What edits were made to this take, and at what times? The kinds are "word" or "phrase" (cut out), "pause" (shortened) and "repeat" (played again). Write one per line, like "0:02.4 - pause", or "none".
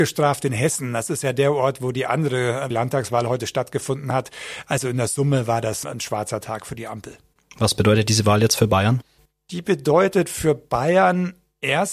0:02.7 - word
0:05.8 - word